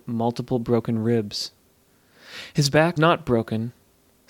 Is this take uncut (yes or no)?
no